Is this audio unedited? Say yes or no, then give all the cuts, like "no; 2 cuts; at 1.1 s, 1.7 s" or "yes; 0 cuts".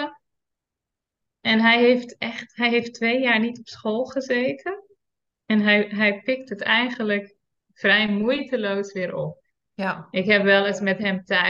yes; 0 cuts